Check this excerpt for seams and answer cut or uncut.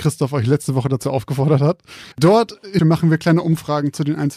cut